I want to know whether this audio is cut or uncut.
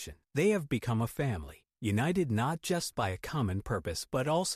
uncut